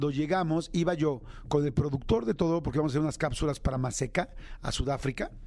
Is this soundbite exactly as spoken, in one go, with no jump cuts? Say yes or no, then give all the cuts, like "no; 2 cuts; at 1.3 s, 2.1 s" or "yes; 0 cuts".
yes; 0 cuts